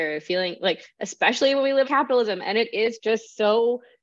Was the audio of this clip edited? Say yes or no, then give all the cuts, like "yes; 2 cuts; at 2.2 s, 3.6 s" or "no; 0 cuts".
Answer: yes; 1 cut; at 1.8 s